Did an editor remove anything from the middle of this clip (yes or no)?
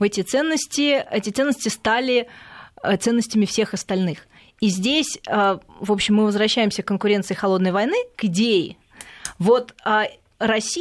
yes